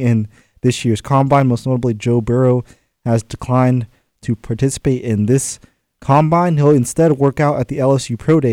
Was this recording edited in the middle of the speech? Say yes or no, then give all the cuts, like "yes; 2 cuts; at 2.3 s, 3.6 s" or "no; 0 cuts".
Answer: no; 0 cuts